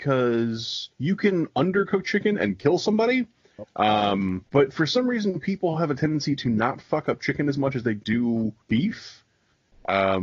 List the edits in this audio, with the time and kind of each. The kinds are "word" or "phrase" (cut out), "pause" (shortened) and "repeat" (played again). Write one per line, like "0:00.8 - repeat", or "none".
0:00.9 - pause
0:04.5 - pause
0:08.6 - pause

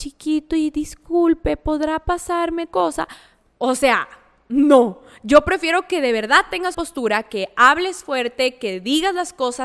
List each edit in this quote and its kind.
0:02.7 - word
0:06.7 - word

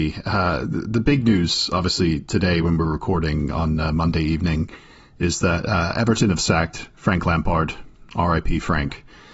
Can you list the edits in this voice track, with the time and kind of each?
none

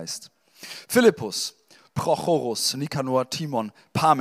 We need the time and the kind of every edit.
none

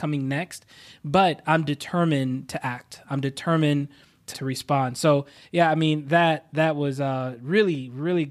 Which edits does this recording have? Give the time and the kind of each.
0:04.3 - phrase

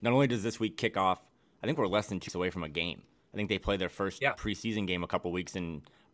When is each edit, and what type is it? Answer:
0:02.3 - word

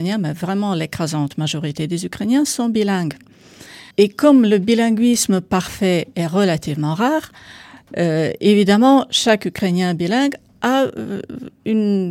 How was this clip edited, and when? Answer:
0:03.9 - pause

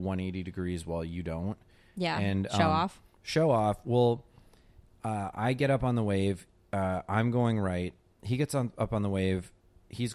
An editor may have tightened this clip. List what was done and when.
none

